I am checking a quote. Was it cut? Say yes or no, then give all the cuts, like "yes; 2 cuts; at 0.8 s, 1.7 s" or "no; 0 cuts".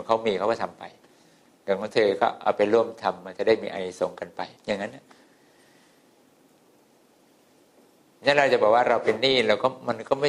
yes; 1 cut; at 4.6 s